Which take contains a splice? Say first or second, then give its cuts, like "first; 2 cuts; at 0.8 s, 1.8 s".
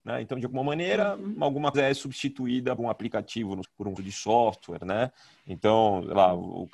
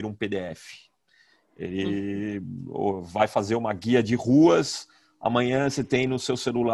first; 4 cuts; at 1.7 s, 2.8 s, 3.6 s, 4.0 s